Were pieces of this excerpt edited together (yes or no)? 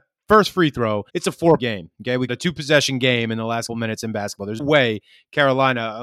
yes